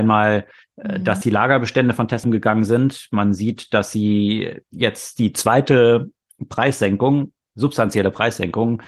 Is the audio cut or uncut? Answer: cut